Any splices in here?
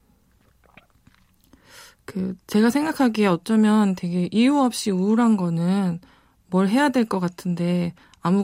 no; 0 cuts

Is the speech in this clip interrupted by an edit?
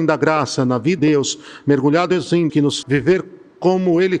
yes; 3 cuts; at 1.0 s, 2.5 s, 2.8 s

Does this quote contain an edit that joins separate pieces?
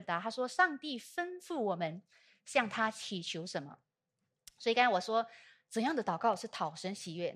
no; 0 cuts

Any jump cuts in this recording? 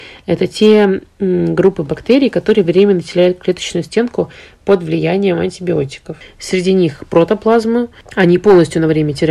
no; 0 cuts

